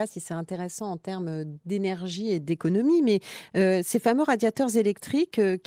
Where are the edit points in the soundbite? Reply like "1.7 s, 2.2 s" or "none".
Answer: none